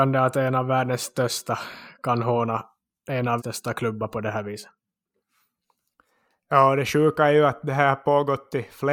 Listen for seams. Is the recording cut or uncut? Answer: cut